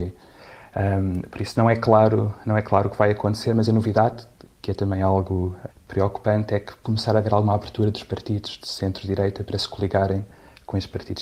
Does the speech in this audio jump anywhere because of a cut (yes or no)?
yes